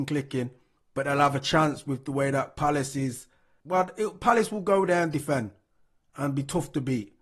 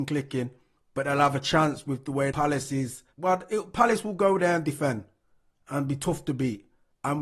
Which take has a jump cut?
second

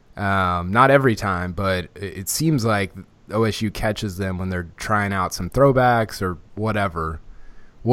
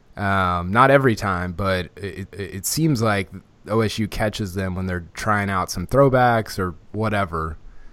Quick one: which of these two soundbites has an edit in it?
second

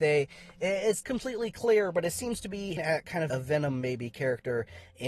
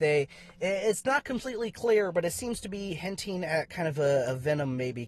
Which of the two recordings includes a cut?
first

